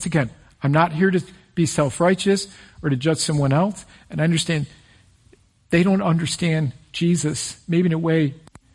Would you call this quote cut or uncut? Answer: uncut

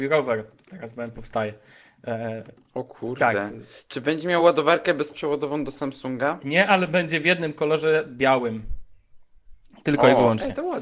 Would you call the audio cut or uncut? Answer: uncut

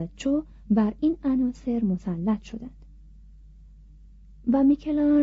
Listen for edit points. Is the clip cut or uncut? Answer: uncut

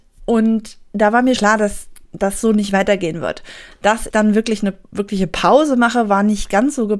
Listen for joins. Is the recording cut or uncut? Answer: cut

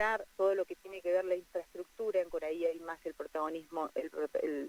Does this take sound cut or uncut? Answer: cut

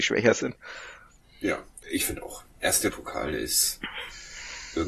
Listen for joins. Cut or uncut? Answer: cut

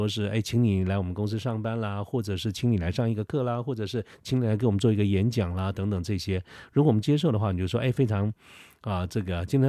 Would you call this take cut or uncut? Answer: uncut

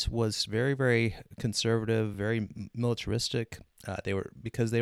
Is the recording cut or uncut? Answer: uncut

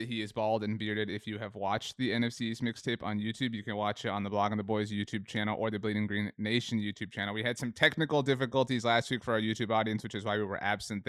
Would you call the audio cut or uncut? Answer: uncut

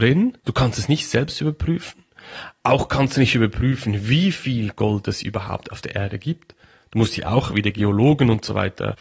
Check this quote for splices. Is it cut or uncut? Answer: uncut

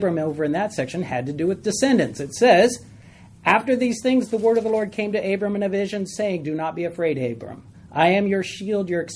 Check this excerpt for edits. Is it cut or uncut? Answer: uncut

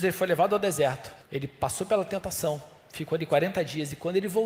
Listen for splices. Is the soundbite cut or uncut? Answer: cut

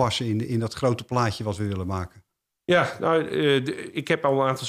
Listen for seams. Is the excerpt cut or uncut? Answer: uncut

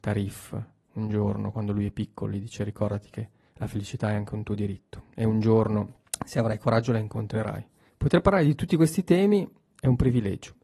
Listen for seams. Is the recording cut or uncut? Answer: uncut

